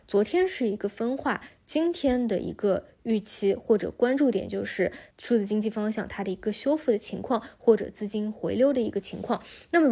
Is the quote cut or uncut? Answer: cut